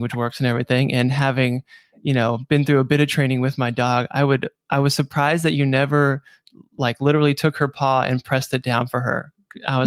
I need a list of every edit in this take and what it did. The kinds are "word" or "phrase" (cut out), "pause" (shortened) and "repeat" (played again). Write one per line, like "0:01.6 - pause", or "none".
none